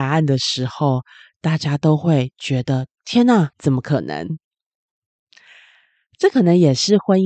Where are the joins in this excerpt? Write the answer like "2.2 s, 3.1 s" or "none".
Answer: 3.5 s